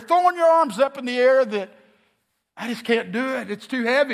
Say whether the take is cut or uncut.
uncut